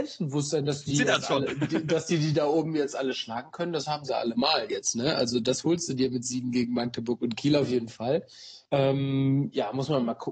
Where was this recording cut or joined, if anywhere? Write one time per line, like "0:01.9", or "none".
0:00.9
0:08.7